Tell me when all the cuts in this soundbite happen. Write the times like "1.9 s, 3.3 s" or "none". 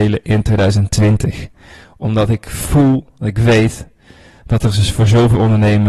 none

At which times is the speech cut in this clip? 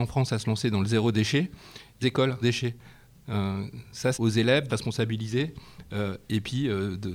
2.0 s, 2.4 s, 4.1 s, 4.7 s

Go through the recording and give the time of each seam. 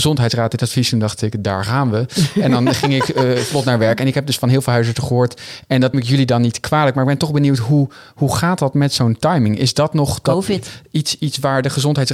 5.9 s

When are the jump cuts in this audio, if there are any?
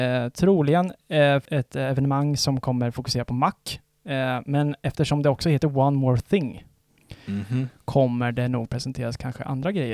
1.4 s

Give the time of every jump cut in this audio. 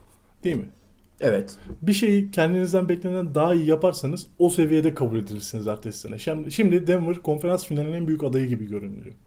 none

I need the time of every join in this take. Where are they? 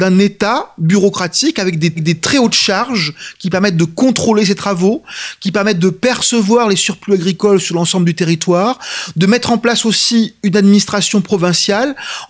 2.0 s

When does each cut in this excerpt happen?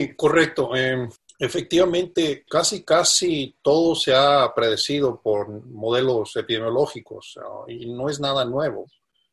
none

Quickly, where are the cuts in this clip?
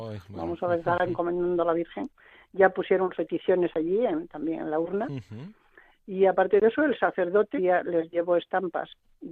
3.1 s, 7.6 s

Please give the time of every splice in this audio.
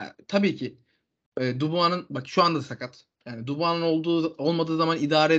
none

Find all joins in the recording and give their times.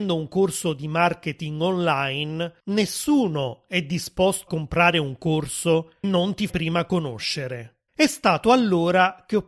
2.6 s, 4.5 s, 6.0 s, 6.5 s, 7.9 s

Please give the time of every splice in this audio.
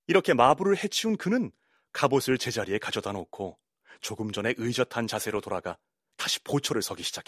none

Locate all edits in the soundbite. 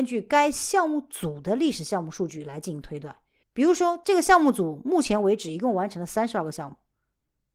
3.4 s

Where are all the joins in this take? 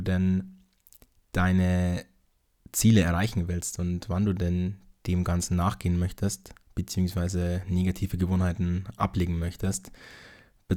none

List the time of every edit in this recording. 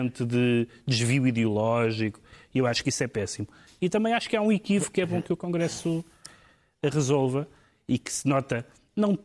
none

